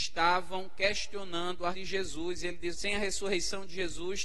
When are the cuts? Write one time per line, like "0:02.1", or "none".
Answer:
0:01.7
0:02.7